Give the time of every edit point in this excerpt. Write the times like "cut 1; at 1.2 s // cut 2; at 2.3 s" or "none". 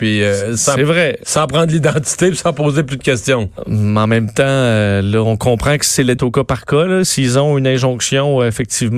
cut 1; at 6.2 s